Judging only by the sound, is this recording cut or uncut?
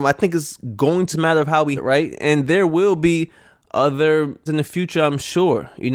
cut